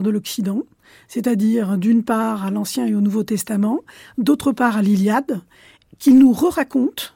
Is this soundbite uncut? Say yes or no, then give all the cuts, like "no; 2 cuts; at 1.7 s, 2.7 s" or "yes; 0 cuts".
yes; 0 cuts